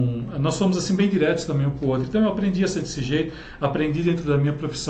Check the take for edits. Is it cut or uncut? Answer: uncut